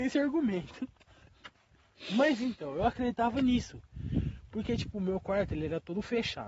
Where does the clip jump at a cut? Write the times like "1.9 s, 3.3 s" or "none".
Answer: none